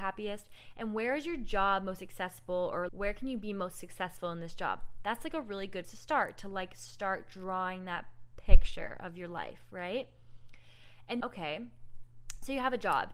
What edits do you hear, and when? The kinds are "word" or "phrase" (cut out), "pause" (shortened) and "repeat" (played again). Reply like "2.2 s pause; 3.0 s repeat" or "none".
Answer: 2.9 s word; 5.8 s word; 11.2 s word